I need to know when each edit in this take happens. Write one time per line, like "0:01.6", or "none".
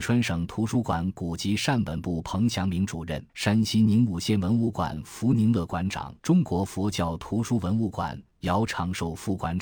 0:03.3
0:06.2